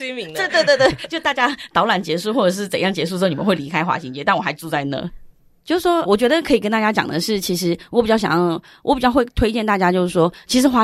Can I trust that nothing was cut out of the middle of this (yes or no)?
no